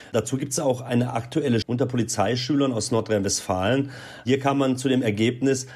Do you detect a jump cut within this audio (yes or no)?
yes